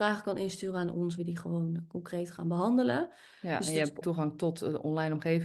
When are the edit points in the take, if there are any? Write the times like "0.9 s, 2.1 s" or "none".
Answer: 1.2 s, 4.0 s